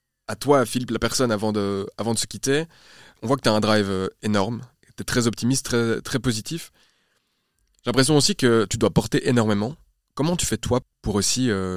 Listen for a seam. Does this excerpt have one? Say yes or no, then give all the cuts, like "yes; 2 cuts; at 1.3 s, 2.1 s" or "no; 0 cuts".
no; 0 cuts